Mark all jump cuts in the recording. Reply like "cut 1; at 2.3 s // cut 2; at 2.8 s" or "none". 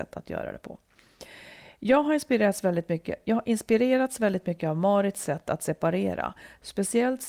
none